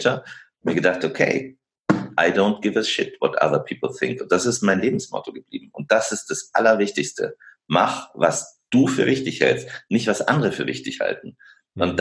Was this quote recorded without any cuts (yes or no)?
yes